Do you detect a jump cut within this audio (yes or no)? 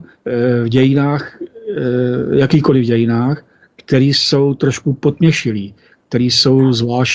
no